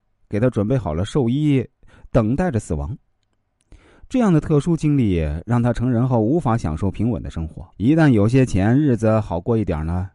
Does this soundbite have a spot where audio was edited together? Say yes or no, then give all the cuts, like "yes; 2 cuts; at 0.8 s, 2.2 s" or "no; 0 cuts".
yes; 1 cut; at 7.7 s